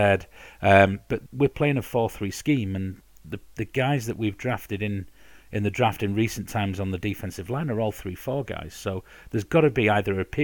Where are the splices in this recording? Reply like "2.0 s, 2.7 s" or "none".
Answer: 1.3 s